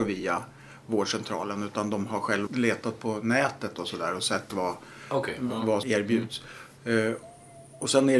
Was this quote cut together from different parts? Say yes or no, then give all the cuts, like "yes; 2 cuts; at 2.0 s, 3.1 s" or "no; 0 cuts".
yes; 2 cuts; at 2.5 s, 5.8 s